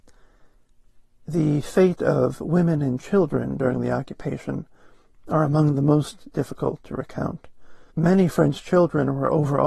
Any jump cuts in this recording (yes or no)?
yes